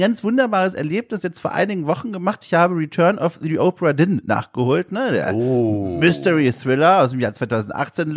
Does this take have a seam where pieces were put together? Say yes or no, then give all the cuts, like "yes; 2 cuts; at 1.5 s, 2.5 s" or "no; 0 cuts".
no; 0 cuts